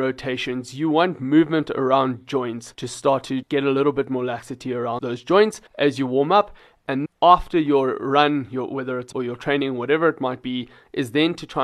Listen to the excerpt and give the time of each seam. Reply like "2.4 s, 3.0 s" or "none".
2.7 s, 3.4 s, 5.0 s, 5.7 s, 7.1 s, 9.1 s